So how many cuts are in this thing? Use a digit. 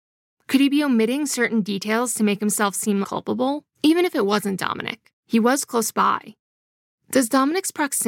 3